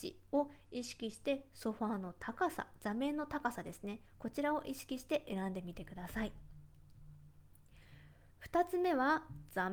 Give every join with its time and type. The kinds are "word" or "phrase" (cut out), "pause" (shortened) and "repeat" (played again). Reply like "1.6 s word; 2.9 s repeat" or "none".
4.1 s pause

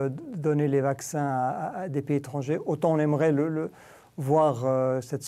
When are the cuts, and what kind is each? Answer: none

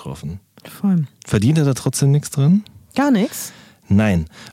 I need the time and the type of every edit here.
none

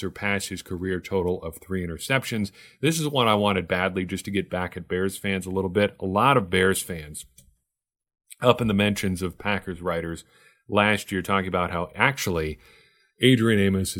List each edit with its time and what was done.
none

